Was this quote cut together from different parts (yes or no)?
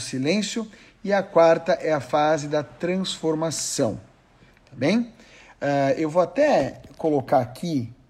no